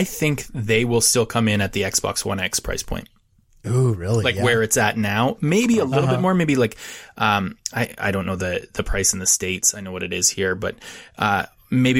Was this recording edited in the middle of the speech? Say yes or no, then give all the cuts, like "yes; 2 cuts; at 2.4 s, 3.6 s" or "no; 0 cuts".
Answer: no; 0 cuts